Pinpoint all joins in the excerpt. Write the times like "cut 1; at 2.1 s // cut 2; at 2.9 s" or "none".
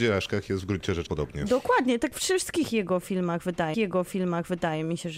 cut 1; at 1.1 s // cut 2; at 3.7 s

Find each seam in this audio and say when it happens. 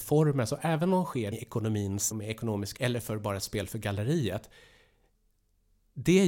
cut 1; at 1.3 s // cut 2; at 2.1 s // cut 3; at 2.8 s

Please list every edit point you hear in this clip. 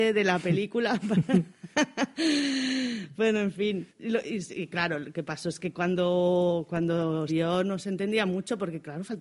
cut 1; at 3.9 s // cut 2; at 7.3 s

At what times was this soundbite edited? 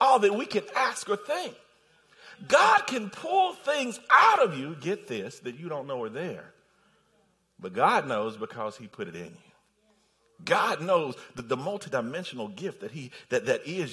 none

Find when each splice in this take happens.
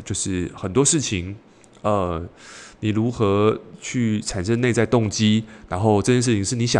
none

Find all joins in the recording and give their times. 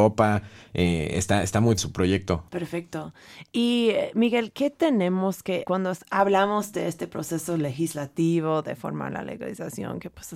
cut 1; at 1.8 s // cut 2; at 2.5 s // cut 3; at 5.6 s

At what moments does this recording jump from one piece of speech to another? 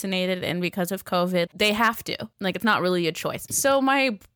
cut 1; at 1.5 s

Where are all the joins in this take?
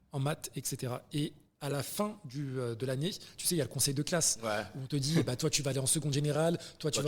none

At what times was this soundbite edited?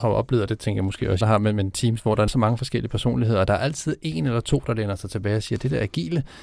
cut 1; at 1.2 s // cut 2; at 2.3 s

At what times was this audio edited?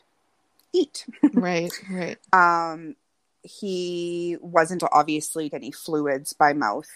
cut 1; at 4.8 s // cut 2; at 5.5 s

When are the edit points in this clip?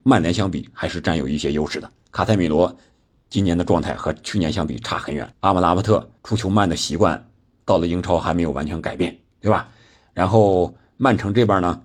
cut 1; at 5.3 s // cut 2; at 6.2 s

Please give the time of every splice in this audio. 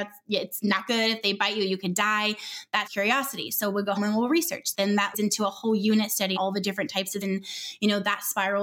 cut 1; at 2.9 s // cut 2; at 4.0 s // cut 3; at 4.7 s // cut 4; at 5.1 s // cut 5; at 6.4 s // cut 6; at 7.2 s

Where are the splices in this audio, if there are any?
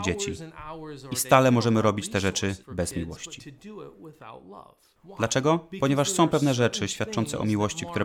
cut 1; at 2.6 s

